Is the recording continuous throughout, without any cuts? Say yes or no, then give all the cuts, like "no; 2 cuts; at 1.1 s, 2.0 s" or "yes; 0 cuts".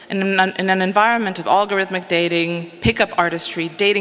yes; 0 cuts